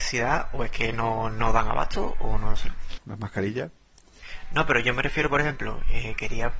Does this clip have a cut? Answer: no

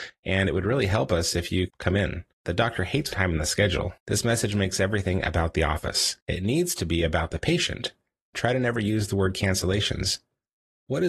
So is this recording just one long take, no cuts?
no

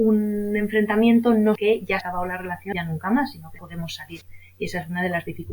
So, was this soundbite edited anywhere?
yes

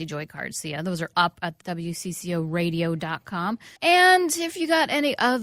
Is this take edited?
yes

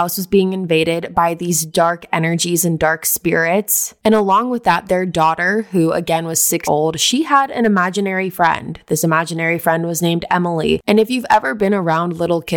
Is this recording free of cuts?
no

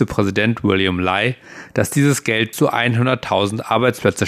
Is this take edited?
yes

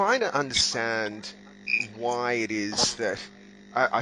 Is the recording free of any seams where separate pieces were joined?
yes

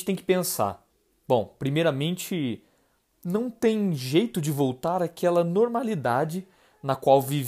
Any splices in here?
no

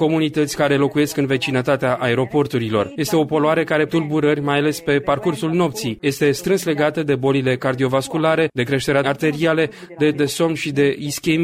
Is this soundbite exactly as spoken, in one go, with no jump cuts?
no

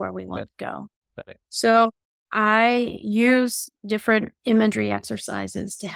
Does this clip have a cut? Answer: no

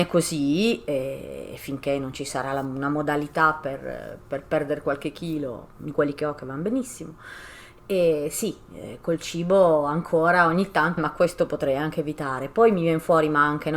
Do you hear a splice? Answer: yes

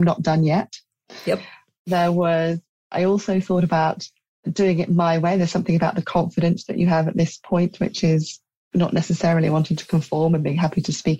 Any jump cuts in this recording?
no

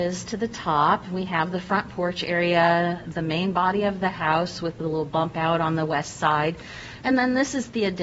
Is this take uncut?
yes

